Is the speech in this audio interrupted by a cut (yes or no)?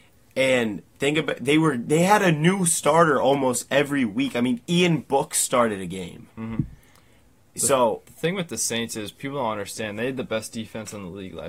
no